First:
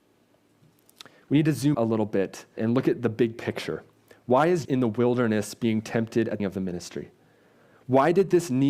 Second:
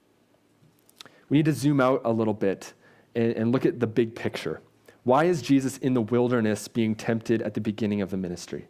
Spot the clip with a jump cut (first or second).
first